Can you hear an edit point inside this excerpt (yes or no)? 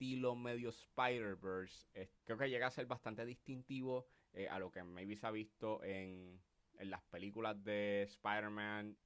no